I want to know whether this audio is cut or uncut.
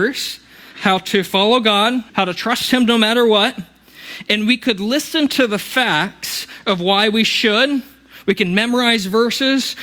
cut